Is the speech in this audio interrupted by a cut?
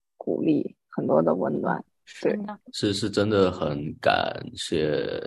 yes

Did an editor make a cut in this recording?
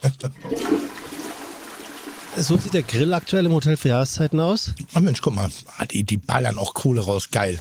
no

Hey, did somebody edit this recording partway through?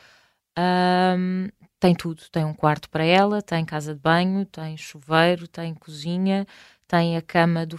no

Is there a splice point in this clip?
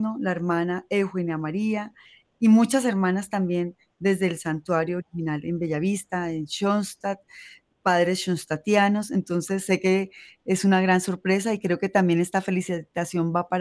no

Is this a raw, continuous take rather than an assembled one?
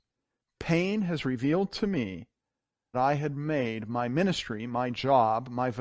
no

